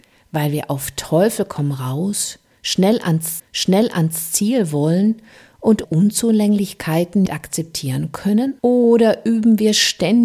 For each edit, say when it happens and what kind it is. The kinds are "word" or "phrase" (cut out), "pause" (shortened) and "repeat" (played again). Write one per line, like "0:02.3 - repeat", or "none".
0:03.4 - repeat
0:05.8 - word
0:07.3 - word
0:08.6 - pause